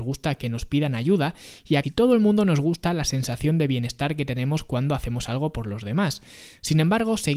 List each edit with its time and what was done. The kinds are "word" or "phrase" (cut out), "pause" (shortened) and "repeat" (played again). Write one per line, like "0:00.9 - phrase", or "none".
0:01.8 - word